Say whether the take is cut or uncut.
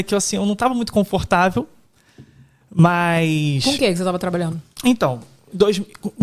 uncut